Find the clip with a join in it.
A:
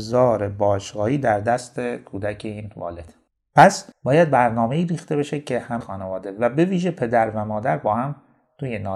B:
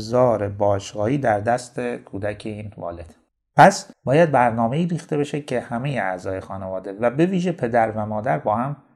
A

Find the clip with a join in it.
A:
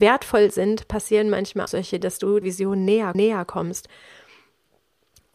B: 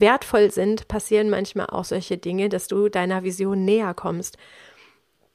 A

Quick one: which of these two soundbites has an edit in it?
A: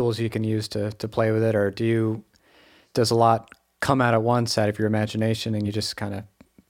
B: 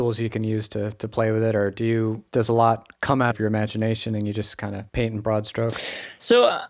B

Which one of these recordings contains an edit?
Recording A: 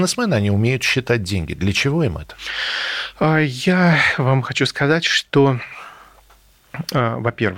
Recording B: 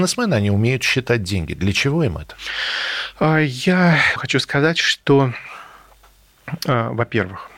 B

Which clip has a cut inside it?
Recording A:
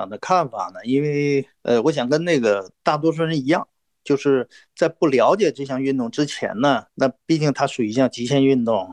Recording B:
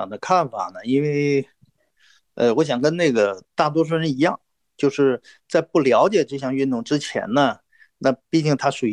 A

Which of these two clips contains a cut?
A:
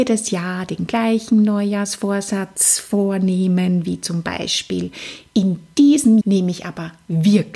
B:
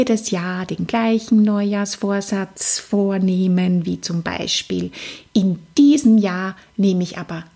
A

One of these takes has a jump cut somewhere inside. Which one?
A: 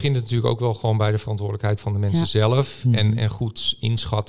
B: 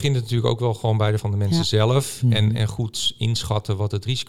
B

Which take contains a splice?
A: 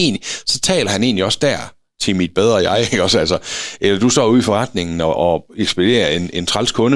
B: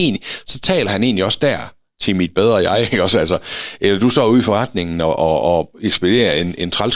A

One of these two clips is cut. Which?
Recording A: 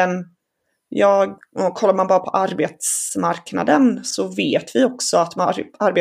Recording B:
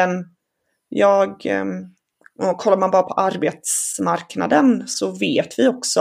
A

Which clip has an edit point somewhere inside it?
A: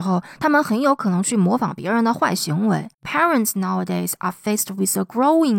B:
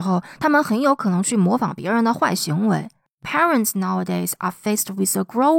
A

